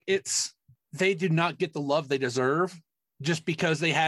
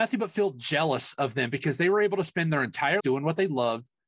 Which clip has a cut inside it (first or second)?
second